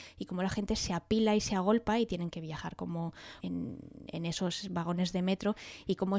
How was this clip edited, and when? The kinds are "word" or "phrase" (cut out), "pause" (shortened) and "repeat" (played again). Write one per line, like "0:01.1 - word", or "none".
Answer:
0:02.3 - word
0:03.4 - phrase